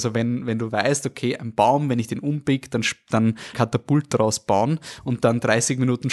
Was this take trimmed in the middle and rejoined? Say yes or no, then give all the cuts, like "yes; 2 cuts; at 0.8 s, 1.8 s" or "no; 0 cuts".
yes; 1 cut; at 3.5 s